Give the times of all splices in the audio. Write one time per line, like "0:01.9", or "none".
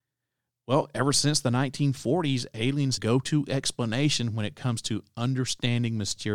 0:03.0